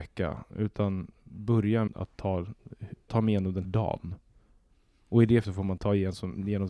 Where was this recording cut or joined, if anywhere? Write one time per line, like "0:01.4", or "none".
0:01.9
0:03.1
0:03.6
0:05.4
0:05.8